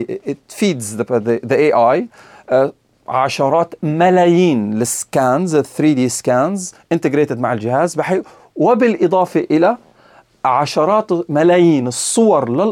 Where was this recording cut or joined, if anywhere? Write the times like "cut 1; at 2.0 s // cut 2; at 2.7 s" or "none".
none